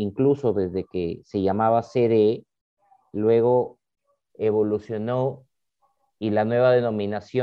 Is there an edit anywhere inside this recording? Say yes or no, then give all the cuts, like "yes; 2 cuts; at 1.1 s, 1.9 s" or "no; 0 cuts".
no; 0 cuts